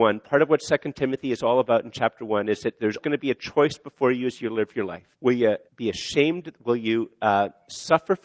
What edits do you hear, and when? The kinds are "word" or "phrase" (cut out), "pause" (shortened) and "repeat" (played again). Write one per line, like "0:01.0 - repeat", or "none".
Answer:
0:03.0 - word
0:05.1 - pause
0:05.7 - pause